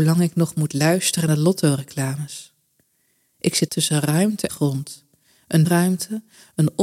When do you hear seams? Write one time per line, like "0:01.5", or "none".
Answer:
0:01.3
0:03.7
0:04.5
0:05.6